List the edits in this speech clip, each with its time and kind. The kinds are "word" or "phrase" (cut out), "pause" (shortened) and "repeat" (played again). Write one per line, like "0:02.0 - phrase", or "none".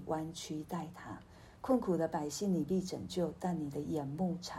0:01.6 - pause

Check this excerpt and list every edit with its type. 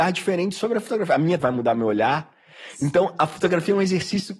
0:01.4 - word

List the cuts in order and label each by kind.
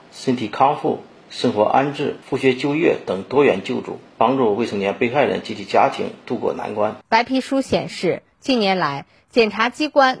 0:02.2 - pause
0:07.0 - pause

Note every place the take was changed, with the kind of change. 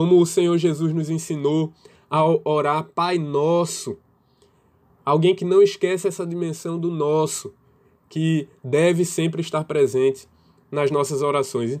none

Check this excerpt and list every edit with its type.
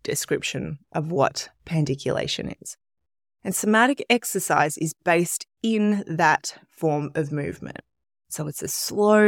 none

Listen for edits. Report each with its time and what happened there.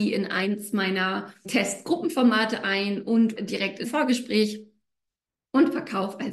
0:01.4 - word
0:03.4 - word
0:03.8 - word

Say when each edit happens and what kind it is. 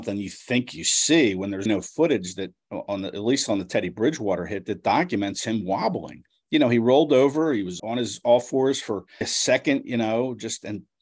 0:01.7 - word
0:07.8 - word
0:09.2 - word

